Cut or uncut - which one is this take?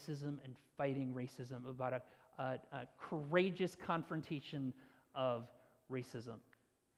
uncut